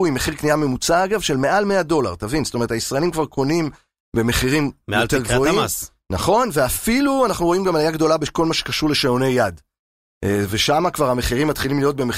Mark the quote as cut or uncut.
uncut